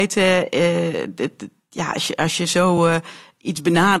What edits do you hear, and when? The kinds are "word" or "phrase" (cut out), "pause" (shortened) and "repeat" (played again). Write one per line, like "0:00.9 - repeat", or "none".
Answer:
none